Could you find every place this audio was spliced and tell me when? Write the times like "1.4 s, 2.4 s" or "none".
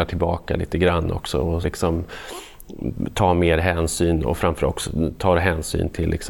1.6 s